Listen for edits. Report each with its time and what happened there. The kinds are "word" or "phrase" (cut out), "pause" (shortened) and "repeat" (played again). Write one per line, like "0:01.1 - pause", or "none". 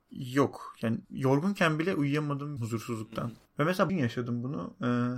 0:01.0 - pause
0:02.6 - word
0:03.5 - pause
0:03.9 - word